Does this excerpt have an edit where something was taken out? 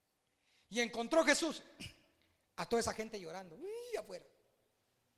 no; 0 cuts

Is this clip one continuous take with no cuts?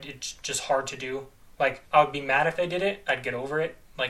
no; 1 cut; at 1.8 s

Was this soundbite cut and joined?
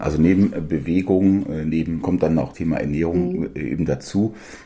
yes; 2 cuts; at 2.0 s, 2.5 s

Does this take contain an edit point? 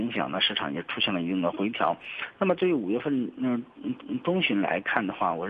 yes; 1 cut; at 4.0 s

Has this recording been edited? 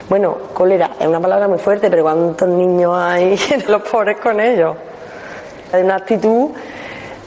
yes; 2 cuts; at 3.7 s, 5.7 s

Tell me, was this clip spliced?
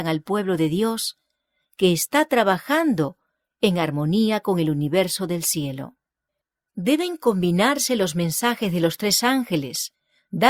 no; 0 cuts

